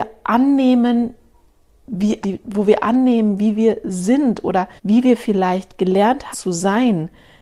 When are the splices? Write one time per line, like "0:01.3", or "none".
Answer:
0:02.2
0:04.8
0:06.3